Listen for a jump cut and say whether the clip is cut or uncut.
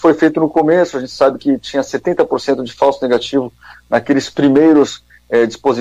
uncut